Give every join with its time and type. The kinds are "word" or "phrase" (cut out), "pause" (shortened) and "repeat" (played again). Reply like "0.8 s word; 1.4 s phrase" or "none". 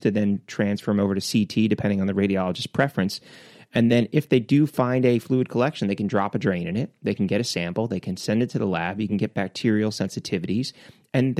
none